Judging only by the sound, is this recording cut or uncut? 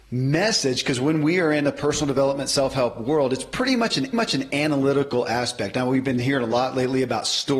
cut